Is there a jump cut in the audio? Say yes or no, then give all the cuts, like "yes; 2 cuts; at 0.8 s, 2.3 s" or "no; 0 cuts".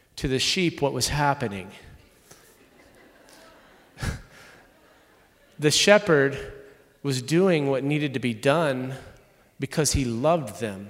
no; 0 cuts